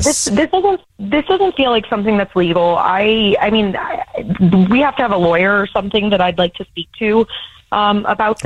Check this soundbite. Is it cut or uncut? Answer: uncut